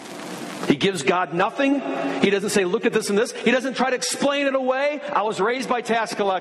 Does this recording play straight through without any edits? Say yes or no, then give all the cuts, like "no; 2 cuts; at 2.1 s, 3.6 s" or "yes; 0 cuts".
yes; 0 cuts